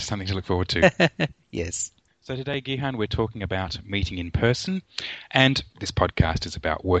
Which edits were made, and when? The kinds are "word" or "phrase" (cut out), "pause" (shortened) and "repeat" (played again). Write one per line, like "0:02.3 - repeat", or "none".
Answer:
none